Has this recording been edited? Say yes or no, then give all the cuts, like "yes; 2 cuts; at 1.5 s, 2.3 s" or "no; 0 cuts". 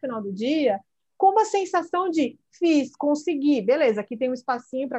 no; 0 cuts